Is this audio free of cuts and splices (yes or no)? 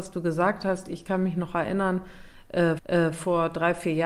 no